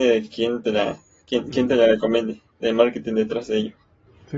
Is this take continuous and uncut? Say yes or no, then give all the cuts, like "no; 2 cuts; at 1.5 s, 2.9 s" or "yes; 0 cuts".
yes; 0 cuts